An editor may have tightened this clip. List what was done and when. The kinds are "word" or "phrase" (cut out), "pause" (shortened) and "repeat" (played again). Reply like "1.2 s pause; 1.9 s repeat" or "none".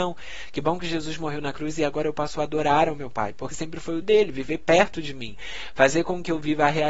3.5 s word; 4.0 s word